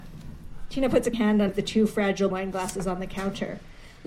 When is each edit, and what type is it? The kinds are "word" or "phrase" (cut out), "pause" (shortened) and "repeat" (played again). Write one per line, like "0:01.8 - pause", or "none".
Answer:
0:01.1 - word
0:01.5 - word
0:02.3 - word